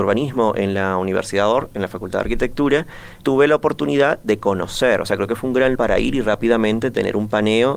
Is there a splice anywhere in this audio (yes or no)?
yes